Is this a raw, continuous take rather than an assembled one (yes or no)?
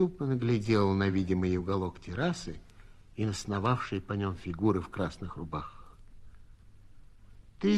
yes